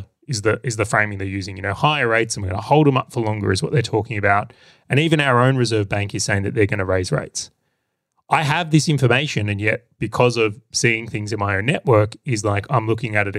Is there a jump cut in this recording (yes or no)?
no